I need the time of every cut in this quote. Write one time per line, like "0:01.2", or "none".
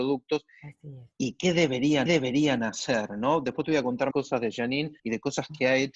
0:01.1
0:02.1
0:04.1
0:05.0

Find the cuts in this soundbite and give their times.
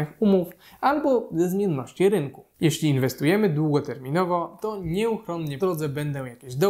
0:05.6

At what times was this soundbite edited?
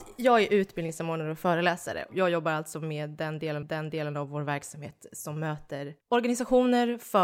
0:03.6
0:06.0

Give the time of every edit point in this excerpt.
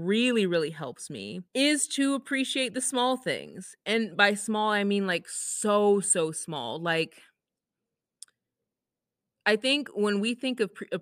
0:01.5

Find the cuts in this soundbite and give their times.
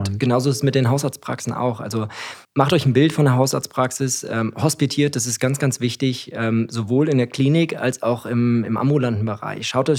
0:02.4

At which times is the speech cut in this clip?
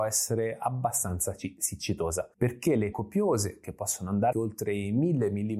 0:02.3
0:02.9
0:04.3

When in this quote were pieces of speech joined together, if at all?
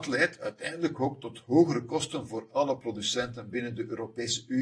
none

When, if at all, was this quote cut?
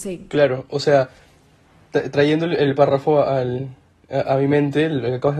none

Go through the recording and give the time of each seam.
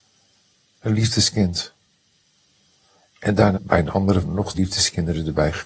0:03.5
0:04.2
0:04.5

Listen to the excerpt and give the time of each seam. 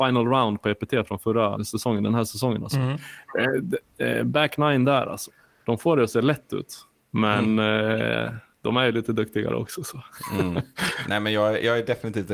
0:01.6

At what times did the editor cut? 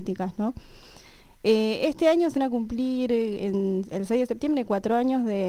0:02.4

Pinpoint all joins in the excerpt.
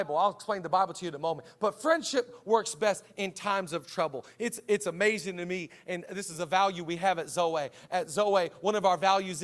none

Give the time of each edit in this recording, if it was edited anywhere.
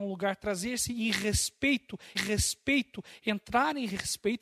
0:02.2

